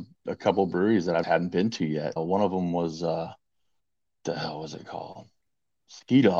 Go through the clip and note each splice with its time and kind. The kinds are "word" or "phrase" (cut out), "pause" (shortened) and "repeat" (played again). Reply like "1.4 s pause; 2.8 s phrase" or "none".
1.2 s word; 2.2 s word; 3.8 s pause